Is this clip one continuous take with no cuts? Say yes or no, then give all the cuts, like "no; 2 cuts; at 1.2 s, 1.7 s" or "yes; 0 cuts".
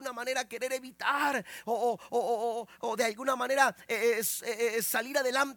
yes; 0 cuts